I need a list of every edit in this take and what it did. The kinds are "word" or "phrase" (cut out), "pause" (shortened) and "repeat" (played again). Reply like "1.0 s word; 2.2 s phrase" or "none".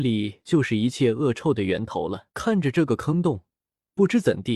2.3 s pause

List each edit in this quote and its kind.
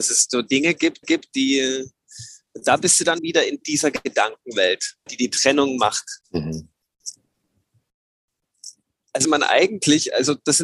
1.0 s repeat; 3.2 s word; 5.1 s word; 6.2 s pause; 9.2 s word

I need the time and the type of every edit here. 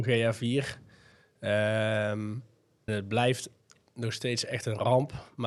2.9 s word

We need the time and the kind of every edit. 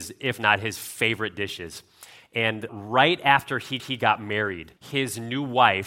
2.7 s word; 3.8 s repeat; 4.8 s pause

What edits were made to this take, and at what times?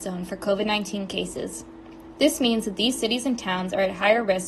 none

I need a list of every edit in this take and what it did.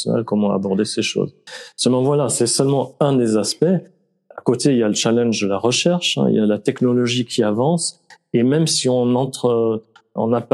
none

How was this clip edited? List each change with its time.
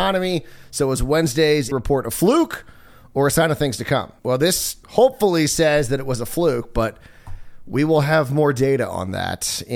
1.7 s word; 4.2 s pause; 4.8 s pause

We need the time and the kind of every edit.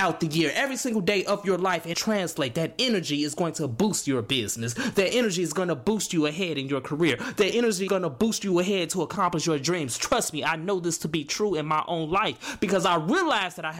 1.9 s phrase; 7.9 s word

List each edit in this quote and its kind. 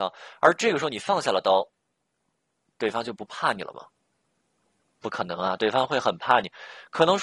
none

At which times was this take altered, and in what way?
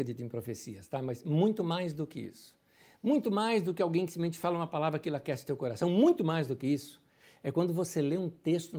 none

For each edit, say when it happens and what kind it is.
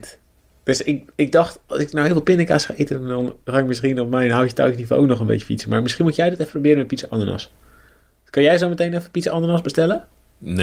none

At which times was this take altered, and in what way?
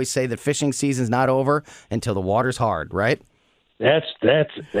none

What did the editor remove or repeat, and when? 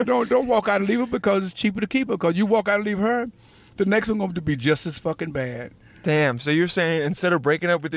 none

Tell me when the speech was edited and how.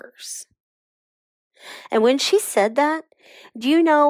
none

